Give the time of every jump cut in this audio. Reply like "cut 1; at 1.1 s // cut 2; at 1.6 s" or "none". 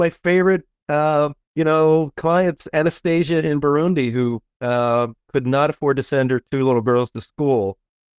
cut 1; at 1.4 s